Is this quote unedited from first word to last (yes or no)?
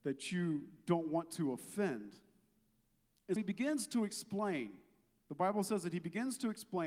no